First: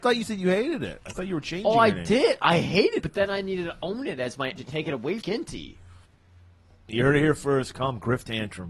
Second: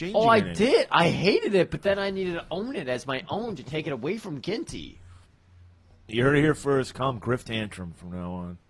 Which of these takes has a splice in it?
first; 3 cuts; at 3.0 s, 4.6 s, 5.2 s

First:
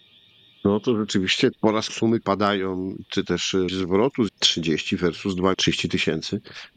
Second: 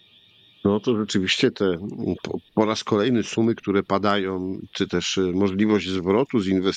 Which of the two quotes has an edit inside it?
first; 6 cuts; at 1.5 s, 1.9 s, 2.2 s, 3.7 s, 4.3 s, 5.5 s

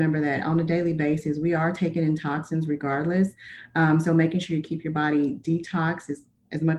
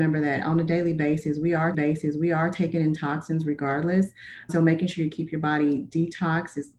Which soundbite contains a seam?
second; 2 cuts; at 1.7 s, 4.5 s

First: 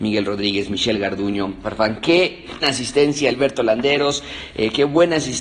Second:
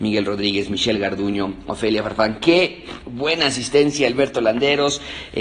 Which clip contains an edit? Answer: first; 2 cuts; at 1.6 s, 2.6 s

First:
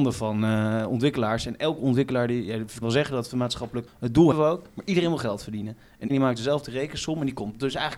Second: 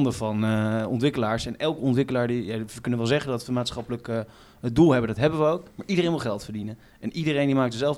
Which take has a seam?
first; 4 cuts; at 2.8 s, 3.9 s, 4.3 s, 6.1 s

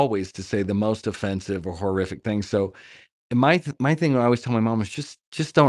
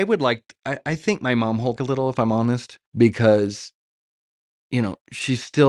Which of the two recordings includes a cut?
second; 2 cuts; at 1.8 s, 2.8 s

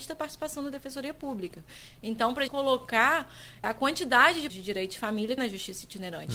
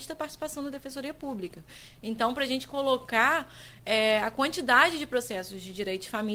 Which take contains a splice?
first; 4 cuts; at 2.5 s, 3.6 s, 4.5 s, 5.4 s

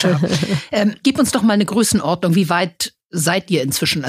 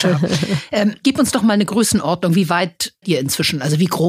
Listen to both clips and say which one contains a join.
second; 1 cut; at 3.0 s

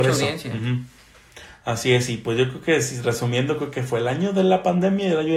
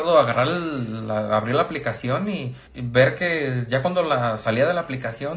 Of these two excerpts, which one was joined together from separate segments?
second; 1 cut; at 2.7 s

